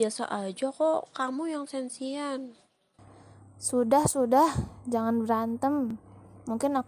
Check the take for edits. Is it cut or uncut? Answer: uncut